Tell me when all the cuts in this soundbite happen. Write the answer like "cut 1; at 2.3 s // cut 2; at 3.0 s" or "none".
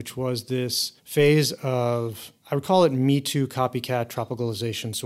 cut 1; at 1.0 s // cut 2; at 2.4 s

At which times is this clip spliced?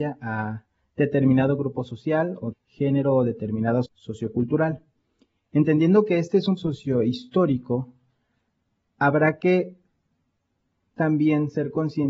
cut 1; at 2.5 s // cut 2; at 3.8 s // cut 3; at 6.6 s

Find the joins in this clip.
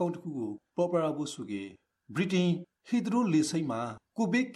none

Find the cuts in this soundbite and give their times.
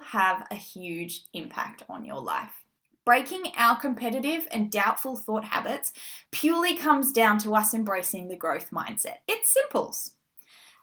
cut 1; at 2.8 s // cut 2; at 6.2 s // cut 3; at 9.2 s

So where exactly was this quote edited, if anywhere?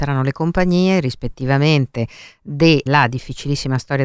cut 1; at 2.9 s

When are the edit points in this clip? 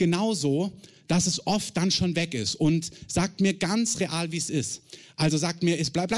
none

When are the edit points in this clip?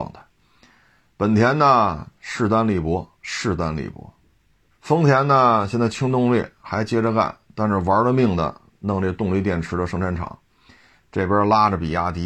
cut 1; at 3.1 s // cut 2; at 4.7 s

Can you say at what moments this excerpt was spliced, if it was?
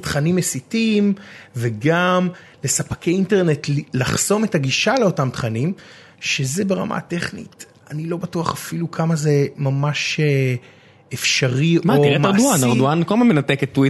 none

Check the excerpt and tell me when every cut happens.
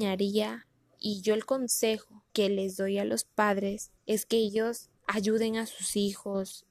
cut 1; at 2.3 s // cut 2; at 4.0 s // cut 3; at 5.0 s

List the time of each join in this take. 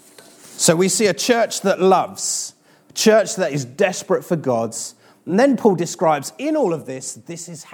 none

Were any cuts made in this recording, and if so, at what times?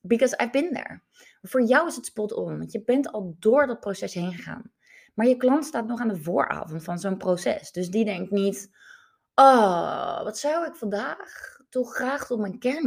none

